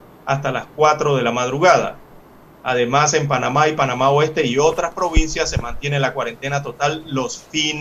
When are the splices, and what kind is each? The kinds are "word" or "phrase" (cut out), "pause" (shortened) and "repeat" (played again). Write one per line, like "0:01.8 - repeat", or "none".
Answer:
none